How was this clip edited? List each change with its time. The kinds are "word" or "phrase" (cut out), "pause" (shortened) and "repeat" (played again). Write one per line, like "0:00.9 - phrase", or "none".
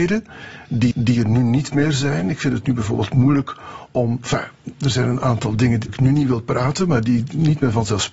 0:00.9 - repeat
0:05.9 - word